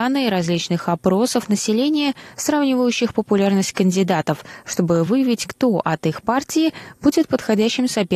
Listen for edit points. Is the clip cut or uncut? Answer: uncut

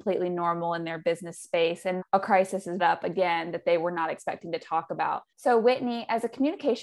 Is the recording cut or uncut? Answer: cut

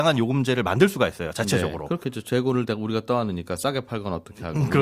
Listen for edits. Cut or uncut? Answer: uncut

